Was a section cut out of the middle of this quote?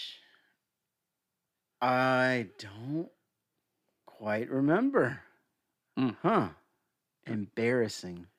no; 0 cuts

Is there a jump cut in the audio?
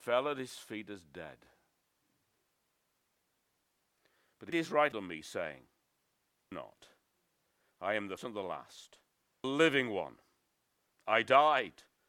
yes; 5 cuts; at 4.5 s, 4.9 s, 6.5 s, 8.2 s, 9.4 s

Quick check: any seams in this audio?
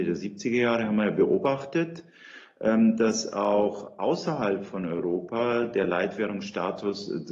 no; 0 cuts

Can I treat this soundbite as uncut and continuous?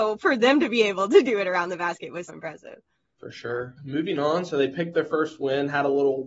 no; 3 cuts; at 2.3 s, 3.8 s, 4.9 s

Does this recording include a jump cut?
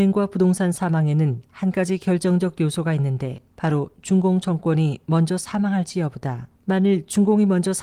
yes; 2 cuts; at 3.5 s, 6.6 s

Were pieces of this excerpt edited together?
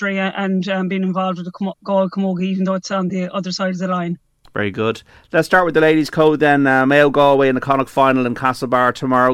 no; 0 cuts

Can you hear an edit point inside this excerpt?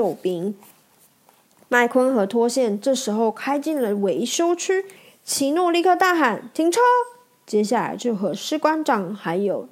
yes; 1 cut; at 5.0 s

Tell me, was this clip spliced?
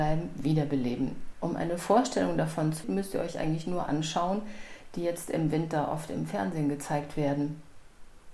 yes; 2 cuts; at 2.8 s, 3.9 s

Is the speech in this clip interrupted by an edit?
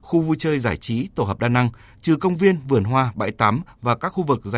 no; 0 cuts

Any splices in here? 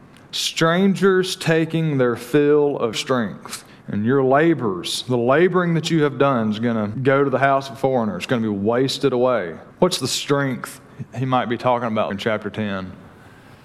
yes; 5 cuts; at 2.9 s, 3.7 s, 6.9 s, 9.7 s, 12.1 s

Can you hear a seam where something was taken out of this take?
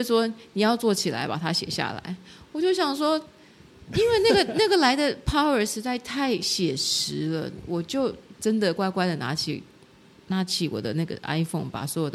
no; 0 cuts

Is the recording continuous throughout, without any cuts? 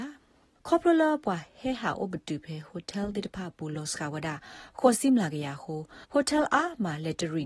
no; 1 cut; at 6.0 s

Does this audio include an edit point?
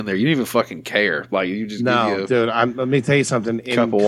no; 0 cuts

